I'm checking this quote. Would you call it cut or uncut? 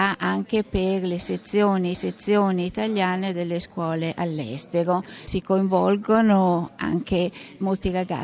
cut